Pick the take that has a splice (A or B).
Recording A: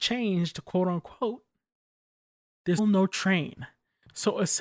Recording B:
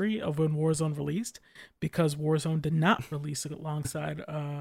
A